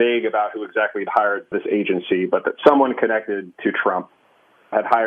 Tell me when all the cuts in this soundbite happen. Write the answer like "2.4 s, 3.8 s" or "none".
none